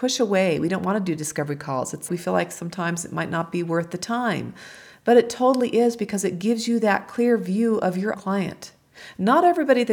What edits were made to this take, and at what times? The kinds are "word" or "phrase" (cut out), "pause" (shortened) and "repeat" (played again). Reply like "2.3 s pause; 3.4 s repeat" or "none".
2.1 s word; 8.1 s word